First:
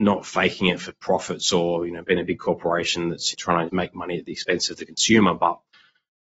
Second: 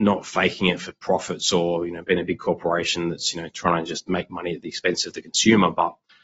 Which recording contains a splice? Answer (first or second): first